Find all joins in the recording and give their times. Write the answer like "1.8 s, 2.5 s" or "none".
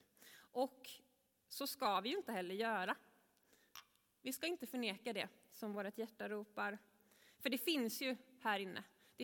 none